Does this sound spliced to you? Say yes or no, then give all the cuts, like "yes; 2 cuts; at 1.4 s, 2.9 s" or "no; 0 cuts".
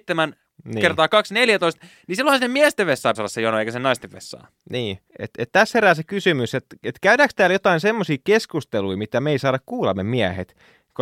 yes; 2 cuts; at 3.1 s, 5.1 s